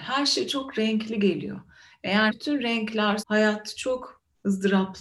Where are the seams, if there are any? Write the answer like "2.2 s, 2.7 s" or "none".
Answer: 2.3 s, 3.2 s